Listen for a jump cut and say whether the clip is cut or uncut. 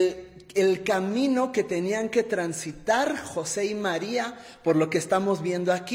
uncut